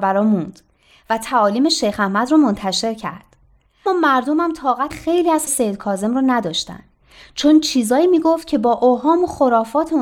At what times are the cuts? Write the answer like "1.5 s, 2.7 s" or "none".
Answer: 3.9 s, 4.9 s, 5.5 s

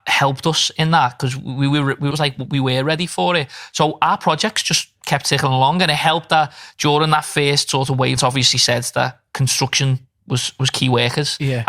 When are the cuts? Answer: 2.1 s, 8.2 s

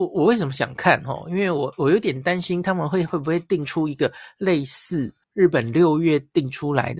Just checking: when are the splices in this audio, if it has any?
5.2 s

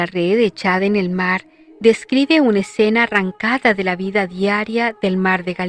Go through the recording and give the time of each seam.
none

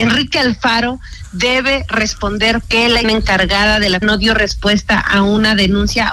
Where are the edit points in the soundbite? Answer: 2.6 s, 3.0 s, 4.0 s

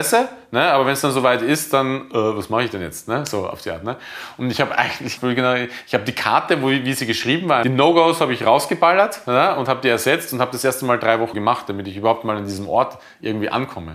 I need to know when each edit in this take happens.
5.2 s, 7.6 s, 11.3 s

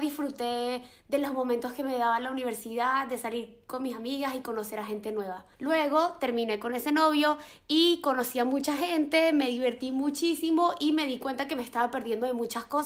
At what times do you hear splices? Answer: 5.5 s

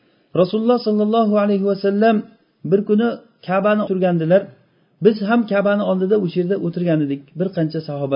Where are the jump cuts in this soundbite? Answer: 3.9 s

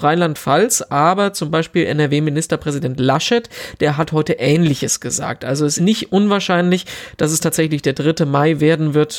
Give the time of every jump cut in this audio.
5.8 s

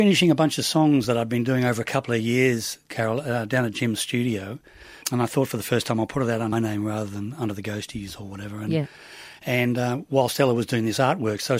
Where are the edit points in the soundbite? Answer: 5.0 s, 6.5 s

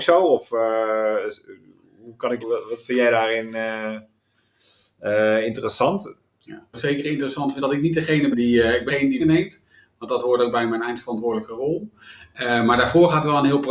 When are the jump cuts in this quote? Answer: 2.4 s, 6.7 s, 7.6 s, 8.3 s, 8.9 s, 9.2 s

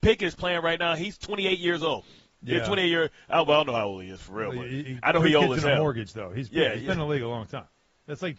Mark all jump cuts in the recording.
none

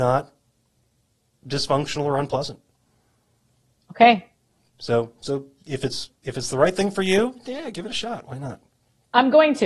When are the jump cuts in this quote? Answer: none

